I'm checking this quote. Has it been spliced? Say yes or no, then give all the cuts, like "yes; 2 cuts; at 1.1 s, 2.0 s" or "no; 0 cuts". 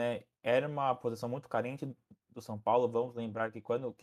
no; 0 cuts